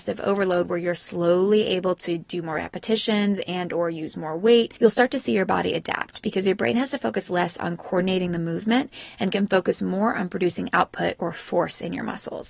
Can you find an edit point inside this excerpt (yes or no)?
no